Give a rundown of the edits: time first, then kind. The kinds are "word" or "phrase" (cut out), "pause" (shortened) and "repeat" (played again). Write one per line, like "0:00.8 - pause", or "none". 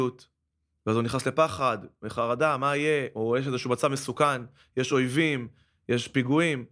none